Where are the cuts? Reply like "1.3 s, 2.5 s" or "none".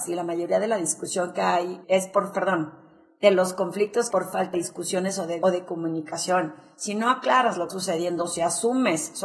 1.8 s, 2.3 s, 4.1 s, 4.5 s, 5.4 s, 7.7 s